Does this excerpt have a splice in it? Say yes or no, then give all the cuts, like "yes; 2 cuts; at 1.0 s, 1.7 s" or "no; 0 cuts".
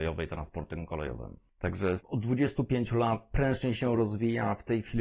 yes; 1 cut; at 2.0 s